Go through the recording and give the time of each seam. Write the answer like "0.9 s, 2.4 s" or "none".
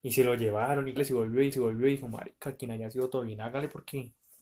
1.0 s, 1.5 s